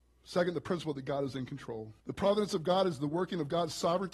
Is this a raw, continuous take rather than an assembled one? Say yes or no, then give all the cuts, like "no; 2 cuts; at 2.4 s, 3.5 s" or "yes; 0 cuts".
no; 1 cut; at 2.0 s